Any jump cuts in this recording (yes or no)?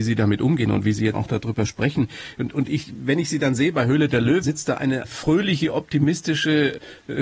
yes